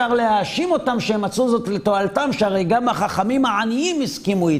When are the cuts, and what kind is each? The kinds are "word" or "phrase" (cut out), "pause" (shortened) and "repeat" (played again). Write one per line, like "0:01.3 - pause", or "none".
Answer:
none